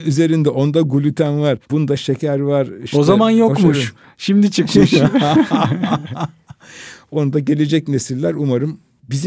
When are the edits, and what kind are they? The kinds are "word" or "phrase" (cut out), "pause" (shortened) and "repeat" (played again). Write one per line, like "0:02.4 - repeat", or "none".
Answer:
0:01.6 - pause